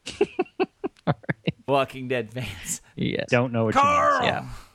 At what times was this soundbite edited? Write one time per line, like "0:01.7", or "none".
0:01.7
0:03.3